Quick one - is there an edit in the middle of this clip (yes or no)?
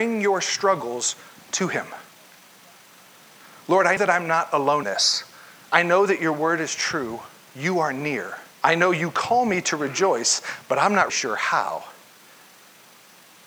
yes